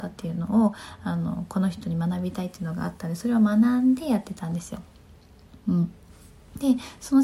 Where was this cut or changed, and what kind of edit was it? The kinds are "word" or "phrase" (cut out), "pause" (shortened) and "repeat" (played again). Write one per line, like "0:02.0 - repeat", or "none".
none